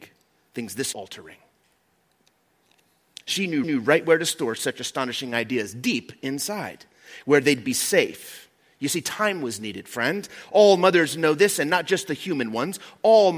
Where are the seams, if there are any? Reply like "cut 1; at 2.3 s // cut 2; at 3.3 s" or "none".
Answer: cut 1; at 0.9 s // cut 2; at 3.6 s